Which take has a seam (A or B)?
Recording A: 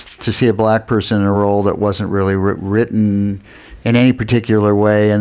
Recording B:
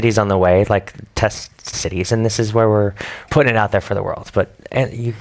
B